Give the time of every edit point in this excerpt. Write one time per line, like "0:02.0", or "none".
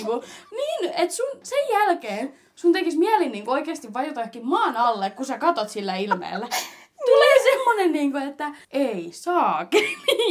0:08.6